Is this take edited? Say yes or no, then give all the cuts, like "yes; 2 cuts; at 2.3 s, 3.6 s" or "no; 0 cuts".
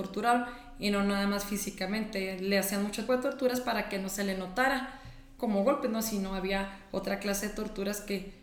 yes; 2 cuts; at 3.1 s, 5.4 s